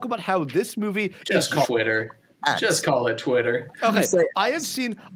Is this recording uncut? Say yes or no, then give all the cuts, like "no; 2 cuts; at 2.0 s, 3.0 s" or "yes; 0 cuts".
no; 1 cut; at 1.6 s